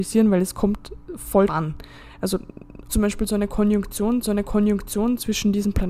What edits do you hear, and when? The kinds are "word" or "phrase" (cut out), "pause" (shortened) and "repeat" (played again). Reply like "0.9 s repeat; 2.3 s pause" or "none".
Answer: 1.5 s word; 2.9 s word; 4.2 s repeat